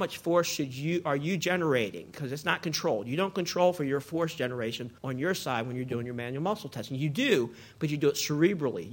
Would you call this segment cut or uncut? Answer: cut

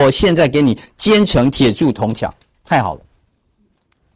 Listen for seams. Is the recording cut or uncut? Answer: uncut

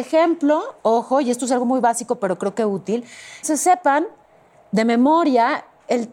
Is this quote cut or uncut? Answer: cut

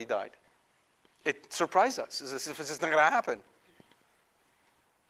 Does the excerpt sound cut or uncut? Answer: uncut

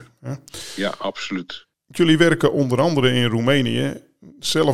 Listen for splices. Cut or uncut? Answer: cut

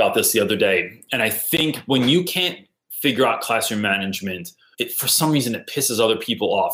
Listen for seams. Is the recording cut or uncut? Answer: cut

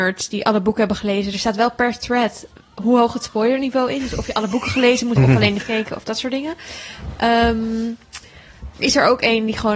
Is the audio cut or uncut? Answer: cut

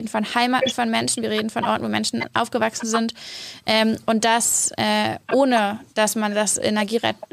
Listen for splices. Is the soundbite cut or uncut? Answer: uncut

